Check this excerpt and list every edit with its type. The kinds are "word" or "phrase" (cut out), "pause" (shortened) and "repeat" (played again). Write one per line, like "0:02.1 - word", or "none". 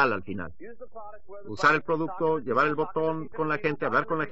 0:03.3 - word